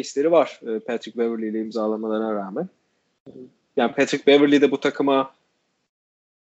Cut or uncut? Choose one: uncut